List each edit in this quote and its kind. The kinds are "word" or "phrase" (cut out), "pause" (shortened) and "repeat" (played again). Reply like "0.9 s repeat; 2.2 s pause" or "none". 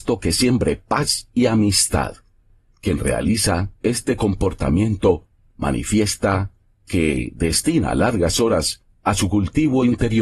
none